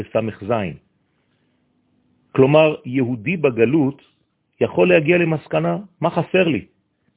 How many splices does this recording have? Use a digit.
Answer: 0